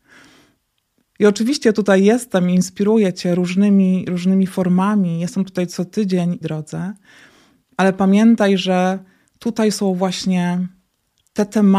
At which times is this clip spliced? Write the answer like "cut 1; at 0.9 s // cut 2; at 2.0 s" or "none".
cut 1; at 6.4 s